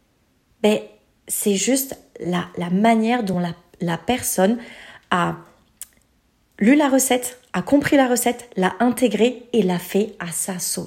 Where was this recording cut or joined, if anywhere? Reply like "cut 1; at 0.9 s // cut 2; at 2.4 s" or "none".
none